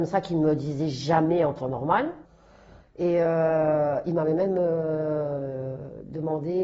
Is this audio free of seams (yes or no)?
yes